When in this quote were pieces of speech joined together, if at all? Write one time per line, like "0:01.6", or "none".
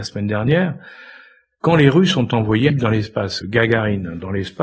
0:02.7
0:03.4